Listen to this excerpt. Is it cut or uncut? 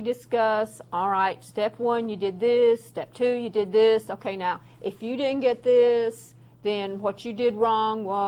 uncut